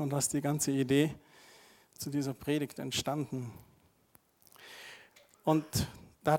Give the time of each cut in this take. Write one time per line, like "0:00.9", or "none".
none